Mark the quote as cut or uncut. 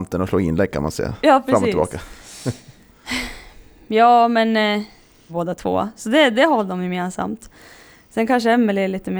cut